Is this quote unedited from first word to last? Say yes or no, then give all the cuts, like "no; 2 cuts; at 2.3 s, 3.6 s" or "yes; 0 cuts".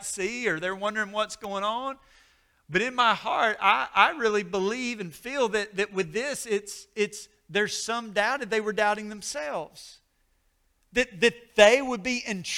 yes; 0 cuts